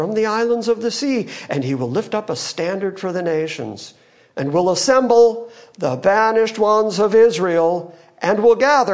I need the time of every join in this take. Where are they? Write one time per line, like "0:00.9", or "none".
none